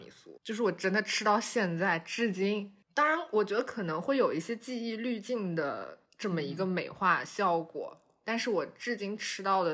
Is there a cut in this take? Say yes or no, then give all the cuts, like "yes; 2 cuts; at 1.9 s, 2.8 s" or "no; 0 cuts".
yes; 2 cuts; at 2.8 s, 6.1 s